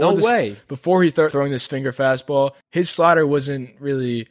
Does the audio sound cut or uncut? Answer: cut